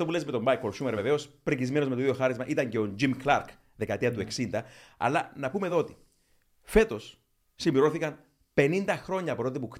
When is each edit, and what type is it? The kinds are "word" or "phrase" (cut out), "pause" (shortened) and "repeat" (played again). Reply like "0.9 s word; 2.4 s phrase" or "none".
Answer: none